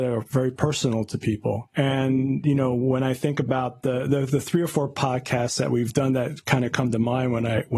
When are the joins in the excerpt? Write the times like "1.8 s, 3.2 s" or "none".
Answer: none